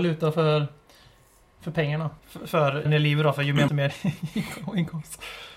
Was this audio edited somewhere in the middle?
yes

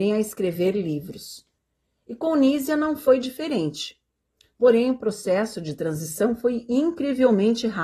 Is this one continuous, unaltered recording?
yes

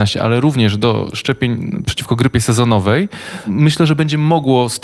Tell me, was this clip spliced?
no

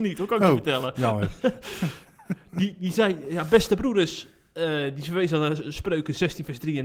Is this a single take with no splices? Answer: yes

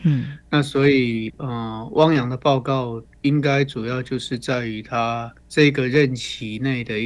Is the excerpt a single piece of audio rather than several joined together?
no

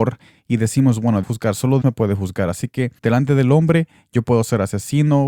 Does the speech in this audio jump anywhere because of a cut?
yes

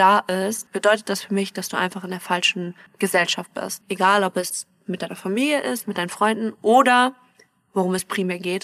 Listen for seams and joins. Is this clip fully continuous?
yes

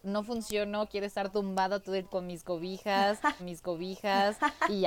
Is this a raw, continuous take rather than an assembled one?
no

